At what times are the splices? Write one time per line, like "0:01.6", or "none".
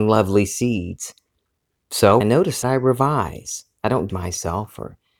0:02.2
0:02.6
0:04.1

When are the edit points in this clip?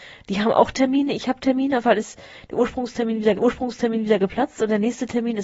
0:01.8
0:03.4

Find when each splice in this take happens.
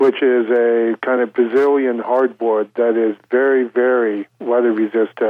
none

